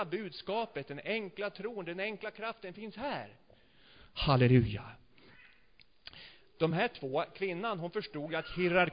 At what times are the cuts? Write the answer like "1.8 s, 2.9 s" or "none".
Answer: none